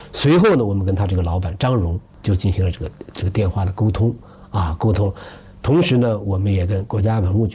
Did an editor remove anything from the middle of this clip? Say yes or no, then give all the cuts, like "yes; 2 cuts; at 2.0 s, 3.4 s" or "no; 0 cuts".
yes; 1 cut; at 2.1 s